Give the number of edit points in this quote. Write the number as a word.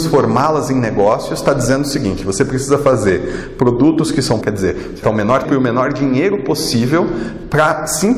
three